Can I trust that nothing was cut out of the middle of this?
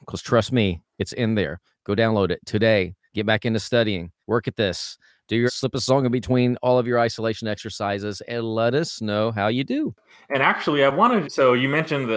no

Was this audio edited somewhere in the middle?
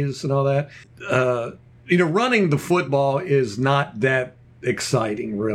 no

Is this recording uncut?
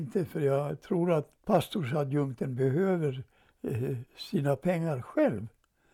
no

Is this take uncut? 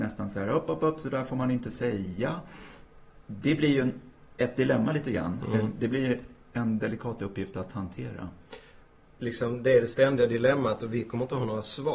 yes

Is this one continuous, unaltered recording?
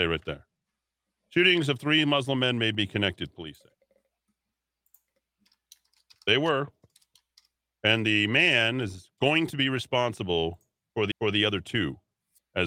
no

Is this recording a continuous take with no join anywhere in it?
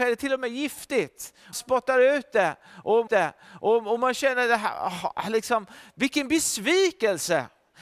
no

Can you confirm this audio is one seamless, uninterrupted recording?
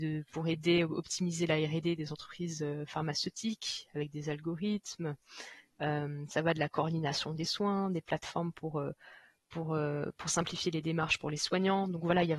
yes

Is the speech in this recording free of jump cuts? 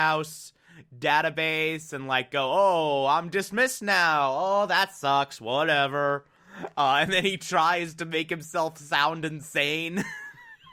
yes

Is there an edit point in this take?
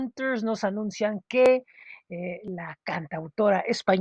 no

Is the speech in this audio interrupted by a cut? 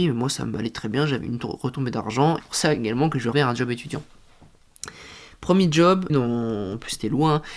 yes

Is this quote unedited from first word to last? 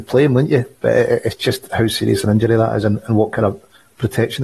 yes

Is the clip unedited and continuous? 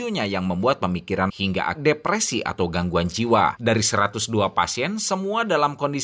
no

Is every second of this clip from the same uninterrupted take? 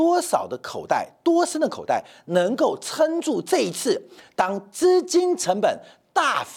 yes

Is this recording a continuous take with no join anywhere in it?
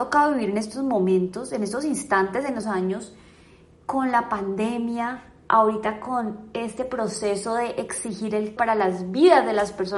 no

